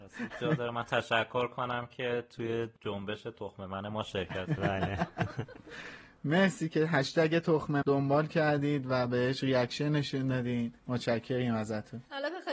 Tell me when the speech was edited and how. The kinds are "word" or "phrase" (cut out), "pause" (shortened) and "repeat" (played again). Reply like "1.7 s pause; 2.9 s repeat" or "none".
4.6 s word; 7.8 s word

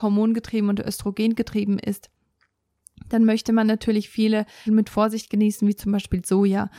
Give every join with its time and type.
4.7 s word

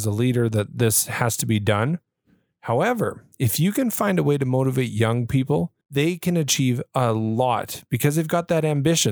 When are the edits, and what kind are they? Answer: 3.3 s pause; 5.8 s pause

